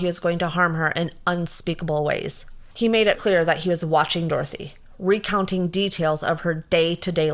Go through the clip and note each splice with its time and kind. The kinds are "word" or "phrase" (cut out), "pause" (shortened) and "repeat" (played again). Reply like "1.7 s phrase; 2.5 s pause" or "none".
2.7 s pause; 3.1 s word